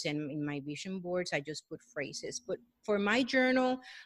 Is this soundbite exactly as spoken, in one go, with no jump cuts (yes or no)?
yes